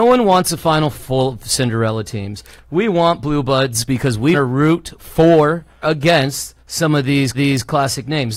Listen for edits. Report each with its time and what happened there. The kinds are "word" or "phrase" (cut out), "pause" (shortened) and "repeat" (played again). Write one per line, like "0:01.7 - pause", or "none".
0:00.9 - word
0:04.3 - word
0:05.8 - word
0:06.6 - pause
0:07.3 - repeat